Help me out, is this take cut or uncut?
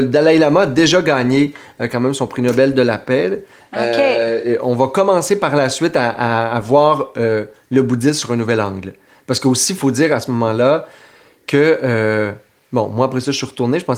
uncut